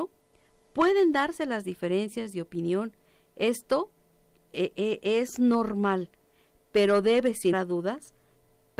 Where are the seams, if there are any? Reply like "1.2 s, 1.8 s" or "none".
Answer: 7.5 s

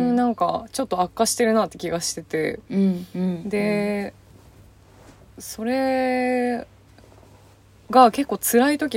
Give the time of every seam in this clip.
none

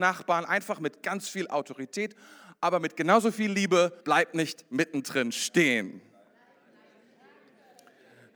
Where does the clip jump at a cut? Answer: 4.0 s

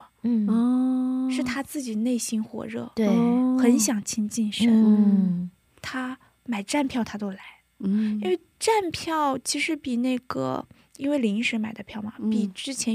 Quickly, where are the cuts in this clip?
none

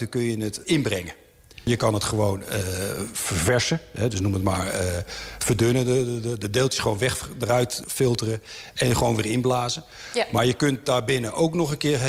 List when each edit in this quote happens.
none

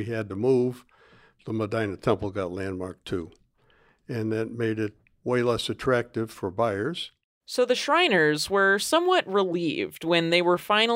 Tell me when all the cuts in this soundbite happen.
none

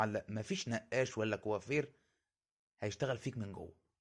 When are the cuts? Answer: none

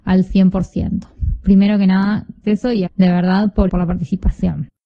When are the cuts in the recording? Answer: 2.4 s, 2.9 s, 3.7 s

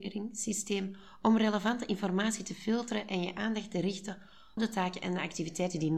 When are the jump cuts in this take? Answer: 4.6 s

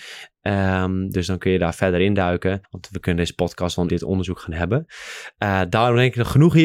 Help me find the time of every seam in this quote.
2.6 s, 3.9 s

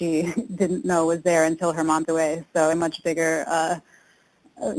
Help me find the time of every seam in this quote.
2.0 s, 2.7 s

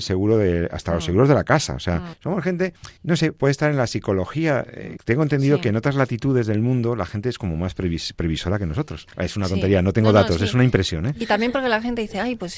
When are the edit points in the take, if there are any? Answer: none

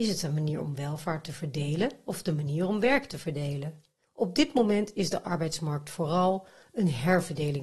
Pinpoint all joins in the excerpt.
4.0 s

